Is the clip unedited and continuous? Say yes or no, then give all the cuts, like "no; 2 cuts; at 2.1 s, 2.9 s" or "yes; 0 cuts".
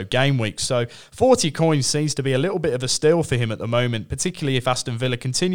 yes; 0 cuts